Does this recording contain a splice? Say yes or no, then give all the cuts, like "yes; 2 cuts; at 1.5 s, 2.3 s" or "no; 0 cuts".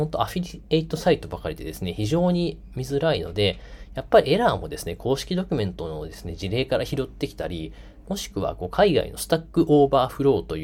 no; 0 cuts